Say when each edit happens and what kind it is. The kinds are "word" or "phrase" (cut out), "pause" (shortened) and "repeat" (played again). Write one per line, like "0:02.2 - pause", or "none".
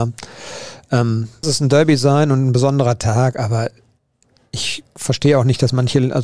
0:01.4 - word